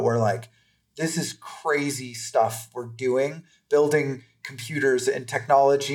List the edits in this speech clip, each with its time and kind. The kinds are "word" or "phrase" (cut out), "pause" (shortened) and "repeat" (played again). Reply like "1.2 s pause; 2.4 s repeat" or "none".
none